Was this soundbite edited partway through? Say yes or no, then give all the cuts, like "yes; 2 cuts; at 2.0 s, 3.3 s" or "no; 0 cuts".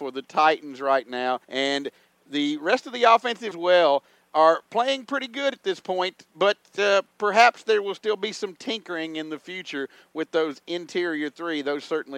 yes; 3 cuts; at 1.4 s, 3.5 s, 6.3 s